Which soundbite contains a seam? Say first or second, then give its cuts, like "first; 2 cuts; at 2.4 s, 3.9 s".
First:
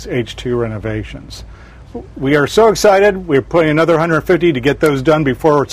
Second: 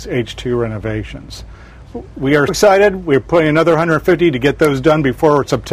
second; 1 cut; at 2.5 s